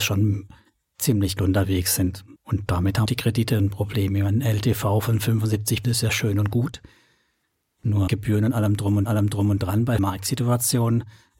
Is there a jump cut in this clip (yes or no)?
yes